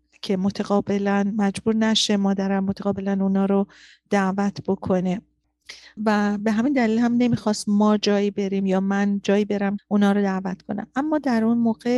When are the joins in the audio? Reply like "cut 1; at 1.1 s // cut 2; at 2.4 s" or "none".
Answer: cut 1; at 6.0 s // cut 2; at 9.8 s